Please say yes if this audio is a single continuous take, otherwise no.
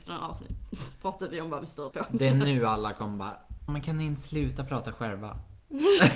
no